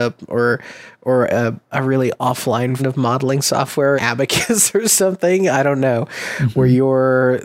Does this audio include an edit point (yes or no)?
yes